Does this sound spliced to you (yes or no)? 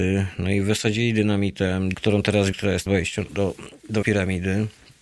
yes